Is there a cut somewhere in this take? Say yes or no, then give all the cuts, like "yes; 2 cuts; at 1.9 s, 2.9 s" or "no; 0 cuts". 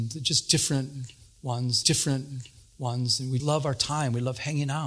yes; 2 cuts; at 1.8 s, 3.4 s